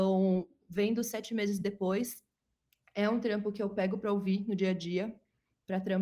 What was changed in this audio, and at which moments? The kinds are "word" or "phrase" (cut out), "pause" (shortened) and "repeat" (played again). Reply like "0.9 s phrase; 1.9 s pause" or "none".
none